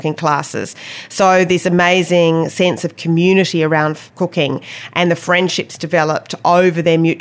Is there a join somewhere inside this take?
yes; 1 cut; at 4.1 s

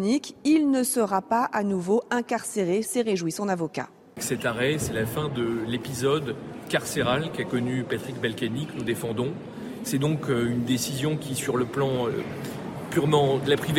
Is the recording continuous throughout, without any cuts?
yes; 0 cuts

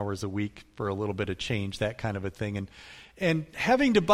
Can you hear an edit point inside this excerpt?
no; 0 cuts

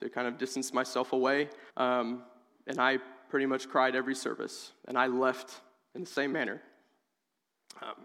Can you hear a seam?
yes; 1 cut; at 1.7 s

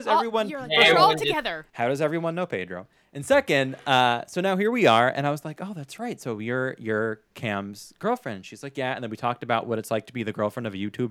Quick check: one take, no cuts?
no; 1 cut; at 1.7 s

